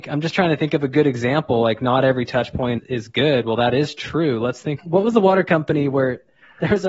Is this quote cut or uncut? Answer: cut